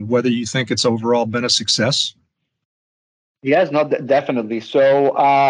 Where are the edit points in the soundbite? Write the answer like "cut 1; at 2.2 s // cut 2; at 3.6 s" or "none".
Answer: none